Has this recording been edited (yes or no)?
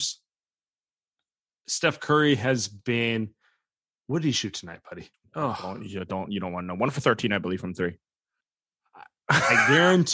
yes